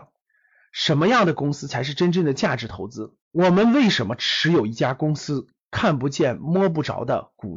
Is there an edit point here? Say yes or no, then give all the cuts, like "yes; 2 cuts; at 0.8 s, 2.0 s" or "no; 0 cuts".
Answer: yes; 1 cut; at 3.2 s